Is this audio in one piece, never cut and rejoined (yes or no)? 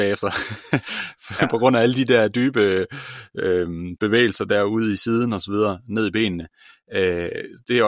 yes